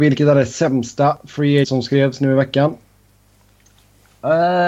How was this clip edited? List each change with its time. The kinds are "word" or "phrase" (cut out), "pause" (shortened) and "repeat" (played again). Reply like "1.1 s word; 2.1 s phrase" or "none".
1.6 s word